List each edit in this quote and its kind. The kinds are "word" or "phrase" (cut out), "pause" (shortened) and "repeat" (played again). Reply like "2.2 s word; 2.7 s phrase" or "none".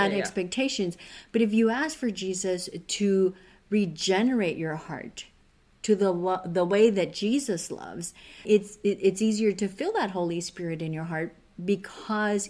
8.4 s word

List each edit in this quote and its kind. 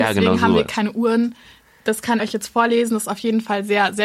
2.2 s word

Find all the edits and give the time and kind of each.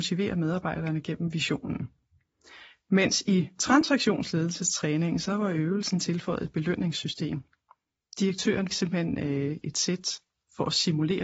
8.7 s word

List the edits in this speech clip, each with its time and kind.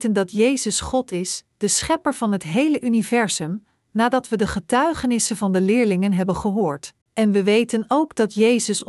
1.5 s pause; 7.0 s pause

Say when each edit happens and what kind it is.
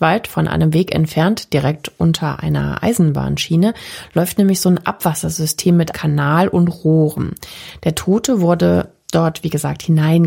5.9 s word

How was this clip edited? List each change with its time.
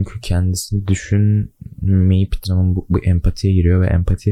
2.4 s phrase

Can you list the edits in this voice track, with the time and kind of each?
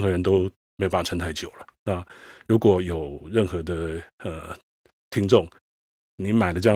none

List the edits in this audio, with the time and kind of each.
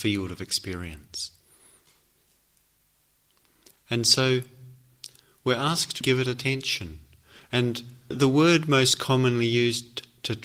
6.0 s word; 8.1 s word

